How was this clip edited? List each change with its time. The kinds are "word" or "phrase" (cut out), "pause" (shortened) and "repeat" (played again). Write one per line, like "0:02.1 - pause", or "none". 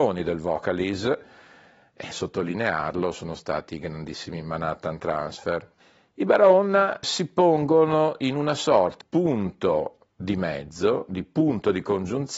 0:02.1 - word
0:05.8 - pause
0:07.0 - word
0:09.0 - word